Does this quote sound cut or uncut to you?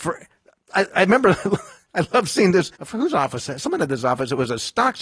cut